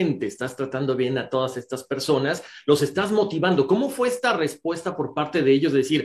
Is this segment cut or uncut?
uncut